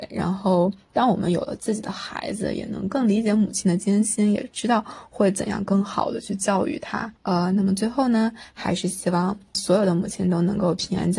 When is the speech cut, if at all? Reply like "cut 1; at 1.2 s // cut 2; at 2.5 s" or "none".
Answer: cut 1; at 7.2 s // cut 2; at 9.5 s

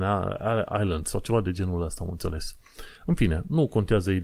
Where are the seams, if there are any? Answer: cut 1; at 3.0 s

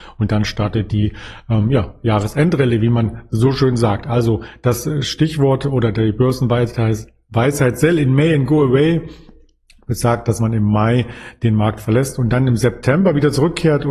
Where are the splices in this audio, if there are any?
none

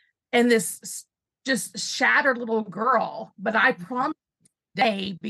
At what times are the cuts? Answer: none

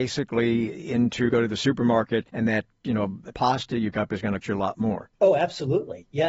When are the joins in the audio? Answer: cut 1; at 1.3 s // cut 2; at 2.3 s // cut 3; at 3.3 s // cut 4; at 3.9 s // cut 5; at 4.4 s // cut 6; at 5.2 s

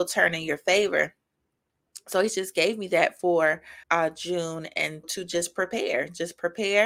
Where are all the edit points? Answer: cut 1; at 3.8 s // cut 2; at 5.0 s

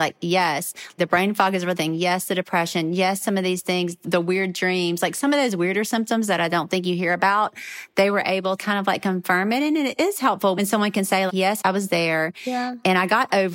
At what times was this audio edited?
cut 1; at 1.0 s // cut 2; at 8.6 s // cut 3; at 11.3 s

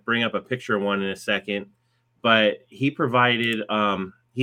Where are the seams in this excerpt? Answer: none

